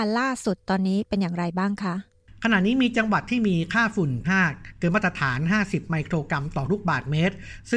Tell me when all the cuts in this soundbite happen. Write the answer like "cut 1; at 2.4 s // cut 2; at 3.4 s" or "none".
cut 1; at 4.2 s